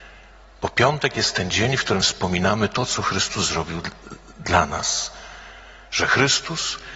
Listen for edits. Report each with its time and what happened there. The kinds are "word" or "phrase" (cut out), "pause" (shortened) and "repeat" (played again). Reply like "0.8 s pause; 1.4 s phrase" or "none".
none